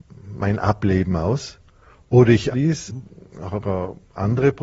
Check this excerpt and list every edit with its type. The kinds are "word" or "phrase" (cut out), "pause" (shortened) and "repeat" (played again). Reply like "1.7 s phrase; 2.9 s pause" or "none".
2.5 s word; 2.9 s word; 3.6 s word